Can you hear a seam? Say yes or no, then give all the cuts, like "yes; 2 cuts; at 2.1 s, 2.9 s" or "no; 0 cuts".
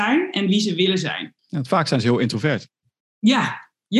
yes; 1 cut; at 1.4 s